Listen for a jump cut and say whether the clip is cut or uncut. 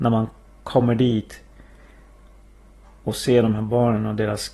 uncut